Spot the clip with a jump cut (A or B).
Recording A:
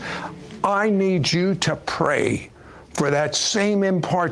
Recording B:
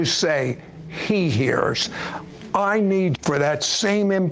B